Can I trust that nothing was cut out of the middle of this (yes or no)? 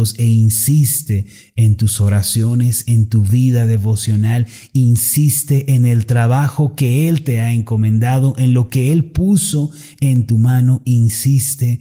yes